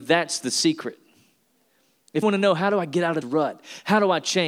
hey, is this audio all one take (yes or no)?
no